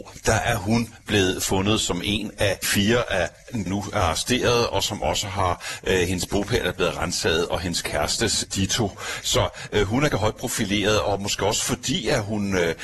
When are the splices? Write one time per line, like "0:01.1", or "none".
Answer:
0:02.6
0:03.7
0:08.5
0:10.1